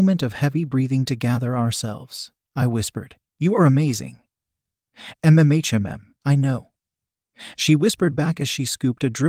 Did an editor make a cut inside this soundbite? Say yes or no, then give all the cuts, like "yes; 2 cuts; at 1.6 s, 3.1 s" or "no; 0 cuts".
yes; 1 cut; at 3.3 s